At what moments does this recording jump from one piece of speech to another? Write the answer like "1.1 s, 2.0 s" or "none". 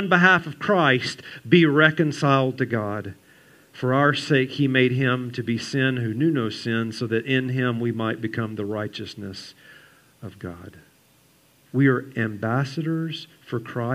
none

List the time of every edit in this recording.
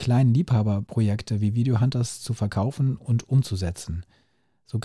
none

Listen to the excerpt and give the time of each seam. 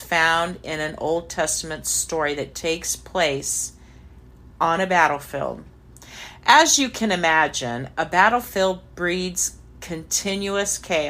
4.5 s

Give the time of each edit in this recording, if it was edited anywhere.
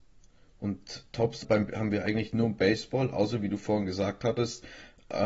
1.4 s

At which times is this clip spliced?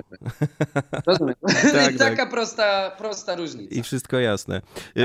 none

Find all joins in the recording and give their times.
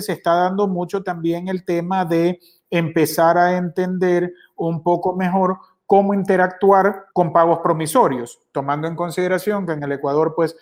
7.1 s

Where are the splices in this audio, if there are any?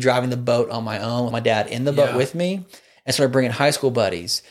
1.3 s

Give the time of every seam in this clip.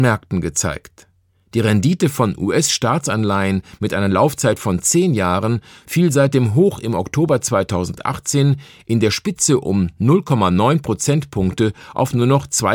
none

